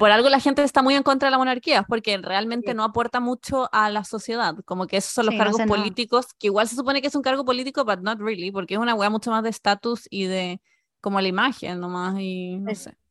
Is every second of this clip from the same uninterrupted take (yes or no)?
yes